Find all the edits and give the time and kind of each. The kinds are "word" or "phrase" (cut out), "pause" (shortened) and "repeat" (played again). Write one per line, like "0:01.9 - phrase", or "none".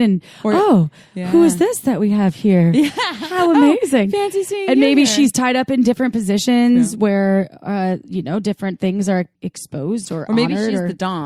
0:09.3 - pause